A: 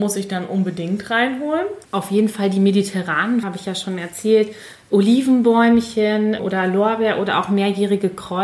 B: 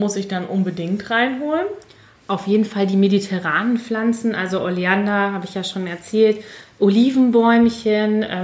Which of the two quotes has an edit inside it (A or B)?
A